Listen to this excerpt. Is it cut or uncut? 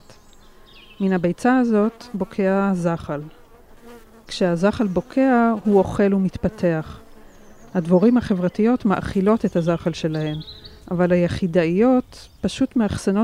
uncut